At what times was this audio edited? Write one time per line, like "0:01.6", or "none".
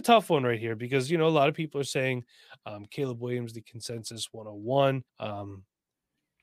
0:05.1